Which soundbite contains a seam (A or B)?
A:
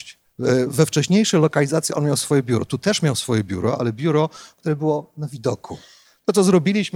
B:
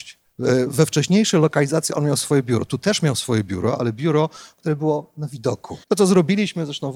B